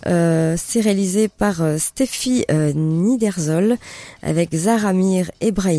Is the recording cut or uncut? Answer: uncut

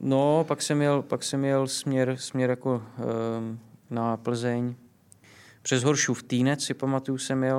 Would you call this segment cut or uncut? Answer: uncut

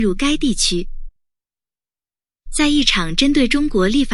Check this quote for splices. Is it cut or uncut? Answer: uncut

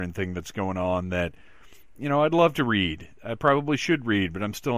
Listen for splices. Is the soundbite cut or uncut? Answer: uncut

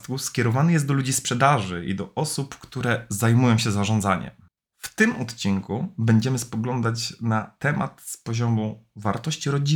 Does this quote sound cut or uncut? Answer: uncut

